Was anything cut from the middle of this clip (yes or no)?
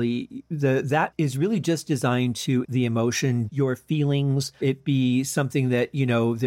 yes